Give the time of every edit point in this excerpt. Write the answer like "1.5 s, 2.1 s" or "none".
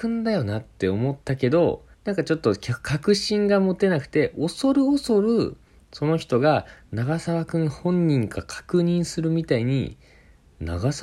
1.2 s, 1.9 s

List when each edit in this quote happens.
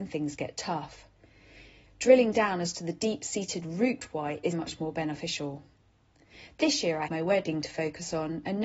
4.5 s, 7.1 s

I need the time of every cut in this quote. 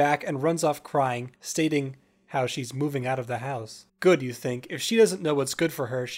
1.4 s, 3.9 s

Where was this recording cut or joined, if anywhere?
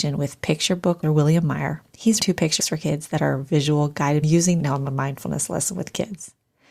1.0 s, 2.2 s, 2.6 s, 4.2 s, 4.6 s

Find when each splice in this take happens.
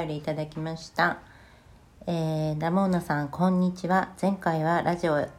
none

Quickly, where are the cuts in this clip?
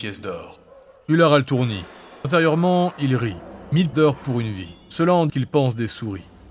2.2 s, 3.9 s, 4.8 s, 5.3 s

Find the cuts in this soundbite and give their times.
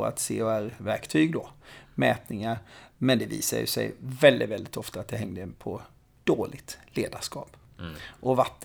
none

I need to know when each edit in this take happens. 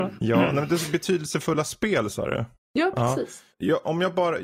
2.6 s, 3.5 s

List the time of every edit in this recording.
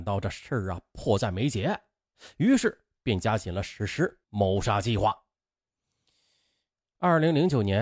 4.2 s

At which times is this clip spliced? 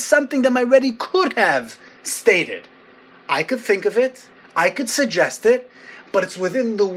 none

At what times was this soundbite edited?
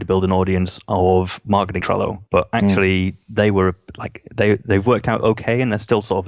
1.8 s, 2.3 s

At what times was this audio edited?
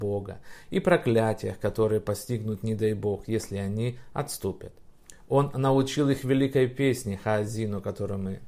none

